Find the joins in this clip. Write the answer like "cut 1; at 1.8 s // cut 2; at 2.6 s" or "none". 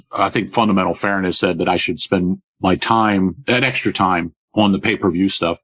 cut 1; at 2.5 s // cut 2; at 4.4 s